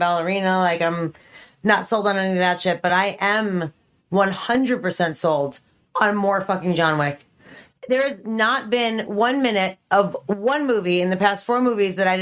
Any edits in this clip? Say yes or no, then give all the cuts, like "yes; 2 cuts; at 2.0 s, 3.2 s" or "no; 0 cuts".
no; 0 cuts